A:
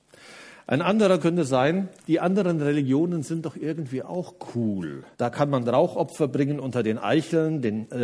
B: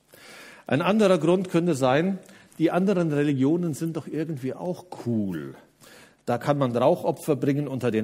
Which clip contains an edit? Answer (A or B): A